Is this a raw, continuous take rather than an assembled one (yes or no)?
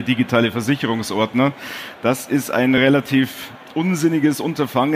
yes